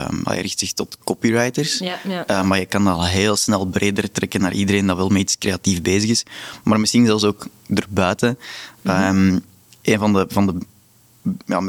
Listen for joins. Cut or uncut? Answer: uncut